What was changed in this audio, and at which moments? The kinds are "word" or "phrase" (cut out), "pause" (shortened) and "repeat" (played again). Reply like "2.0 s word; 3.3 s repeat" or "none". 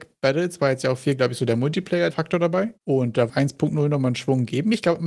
2.1 s phrase; 3.3 s phrase